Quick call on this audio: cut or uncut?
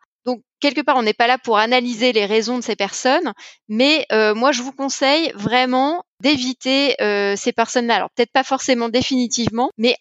uncut